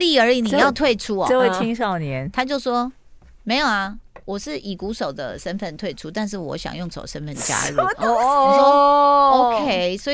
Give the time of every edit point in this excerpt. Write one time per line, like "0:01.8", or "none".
0:06.9

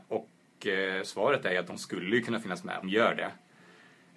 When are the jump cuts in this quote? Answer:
0:02.8

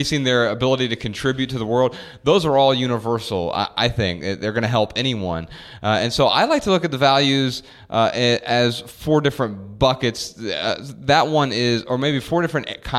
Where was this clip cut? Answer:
none

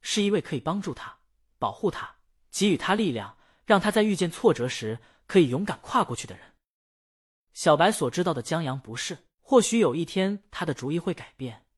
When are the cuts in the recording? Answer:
0:09.3

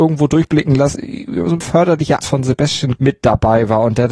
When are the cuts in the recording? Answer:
0:00.9
0:01.6
0:02.2
0:03.0

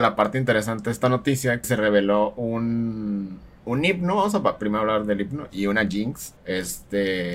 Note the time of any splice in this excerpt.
0:01.6
0:06.4

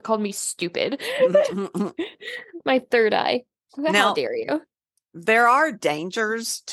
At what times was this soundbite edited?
none

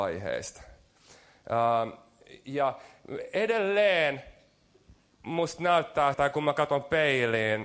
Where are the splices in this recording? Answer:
0:06.1

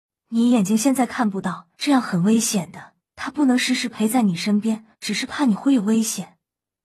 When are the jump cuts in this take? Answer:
0:01.7
0:03.0
0:04.9

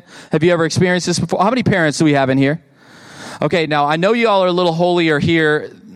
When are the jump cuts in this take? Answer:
none

